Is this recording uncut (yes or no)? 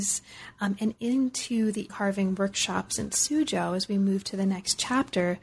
no